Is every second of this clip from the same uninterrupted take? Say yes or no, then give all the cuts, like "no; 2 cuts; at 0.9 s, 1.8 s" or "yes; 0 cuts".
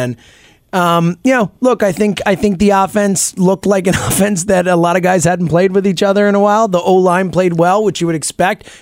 yes; 0 cuts